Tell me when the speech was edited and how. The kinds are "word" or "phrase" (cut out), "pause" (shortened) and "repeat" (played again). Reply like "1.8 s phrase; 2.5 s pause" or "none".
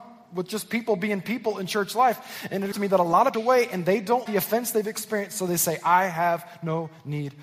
2.7 s word; 3.3 s phrase; 4.3 s word